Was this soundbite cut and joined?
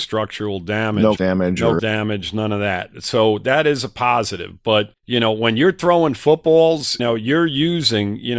yes; 4 cuts; at 1.2 s, 1.8 s, 5.0 s, 7.0 s

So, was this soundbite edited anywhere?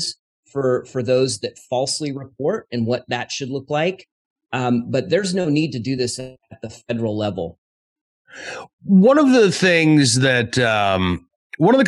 no; 0 cuts

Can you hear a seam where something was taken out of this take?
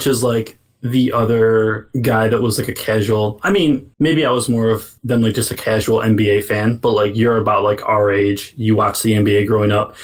yes; 2 cuts; at 3.9 s, 5.0 s

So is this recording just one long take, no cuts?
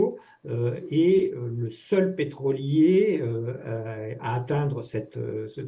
yes; 0 cuts

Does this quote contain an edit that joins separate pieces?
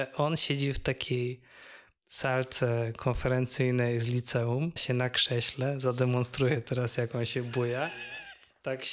yes; 1 cut; at 4.8 s

